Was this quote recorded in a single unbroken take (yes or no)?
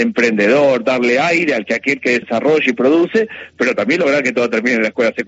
no